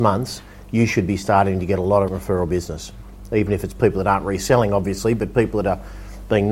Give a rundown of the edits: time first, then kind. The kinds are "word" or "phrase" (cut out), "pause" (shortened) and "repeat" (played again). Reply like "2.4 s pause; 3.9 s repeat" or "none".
2.1 s word